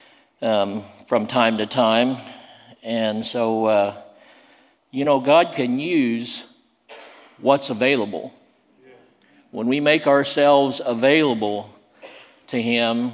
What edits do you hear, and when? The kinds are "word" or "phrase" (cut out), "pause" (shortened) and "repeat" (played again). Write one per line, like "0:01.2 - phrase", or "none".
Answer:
none